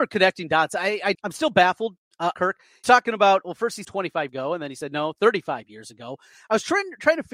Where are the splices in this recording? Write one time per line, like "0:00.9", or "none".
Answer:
0:01.1
0:02.3
0:02.8
0:03.8
0:04.3